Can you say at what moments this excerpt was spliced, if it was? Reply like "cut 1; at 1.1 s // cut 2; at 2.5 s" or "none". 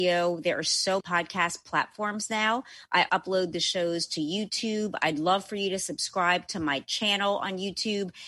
cut 1; at 1.0 s // cut 2; at 3.1 s